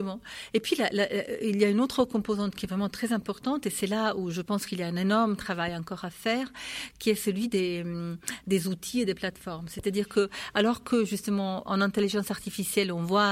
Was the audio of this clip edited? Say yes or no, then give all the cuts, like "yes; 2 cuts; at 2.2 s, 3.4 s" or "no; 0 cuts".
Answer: yes; 1 cut; at 11.7 s